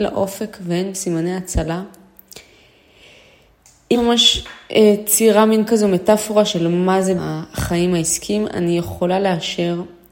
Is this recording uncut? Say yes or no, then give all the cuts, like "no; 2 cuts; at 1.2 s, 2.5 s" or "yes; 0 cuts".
no; 4 cuts; at 0.9 s, 3.9 s, 5.7 s, 7.2 s